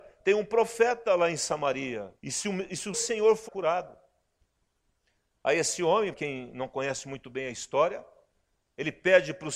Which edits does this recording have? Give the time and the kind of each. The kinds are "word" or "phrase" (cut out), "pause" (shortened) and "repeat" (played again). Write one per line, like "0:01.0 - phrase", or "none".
0:02.2 - pause
0:02.9 - word
0:03.5 - phrase
0:06.1 - word